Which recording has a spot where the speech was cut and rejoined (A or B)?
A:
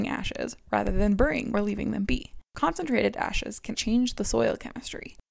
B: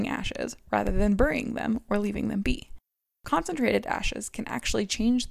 A